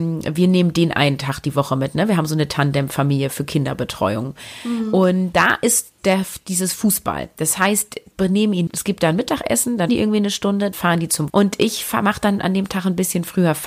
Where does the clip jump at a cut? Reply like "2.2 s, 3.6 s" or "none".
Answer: 5.3 s, 8.1 s, 8.7 s, 9.9 s, 10.7 s, 11.3 s